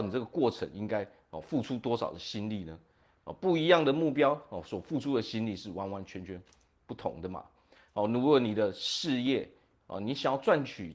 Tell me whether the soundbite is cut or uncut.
uncut